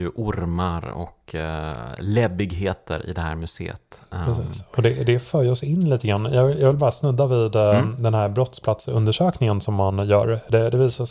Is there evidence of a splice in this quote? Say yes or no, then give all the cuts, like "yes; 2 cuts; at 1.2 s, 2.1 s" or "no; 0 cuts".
no; 0 cuts